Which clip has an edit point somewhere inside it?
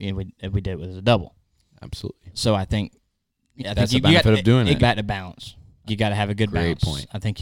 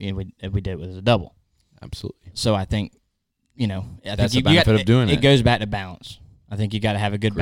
first; 3 cuts; at 3.6 s, 4.8 s, 5.9 s

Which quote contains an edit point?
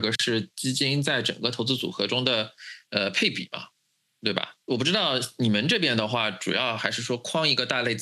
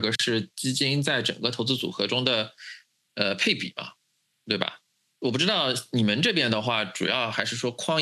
first; 2 cuts; at 2.8 s, 4.6 s

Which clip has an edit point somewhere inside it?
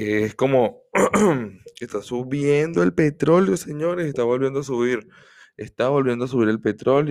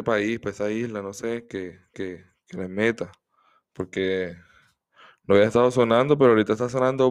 second; 1 cut; at 1.9 s

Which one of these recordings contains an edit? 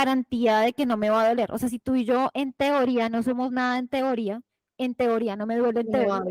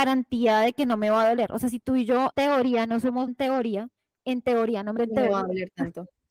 second; 3 cuts; at 2.3 s, 3.3 s, 5.0 s

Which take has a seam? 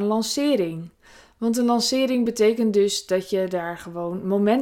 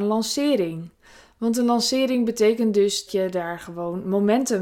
second; 1 cut; at 3.1 s

